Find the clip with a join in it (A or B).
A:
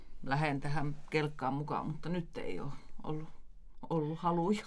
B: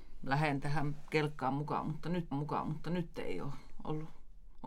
B